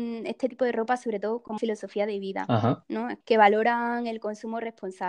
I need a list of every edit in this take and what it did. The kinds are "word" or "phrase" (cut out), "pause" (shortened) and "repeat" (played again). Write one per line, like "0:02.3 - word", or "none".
0:01.6 - word
0:03.2 - word